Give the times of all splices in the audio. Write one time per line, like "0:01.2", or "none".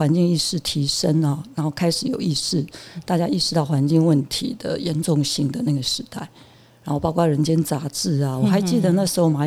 none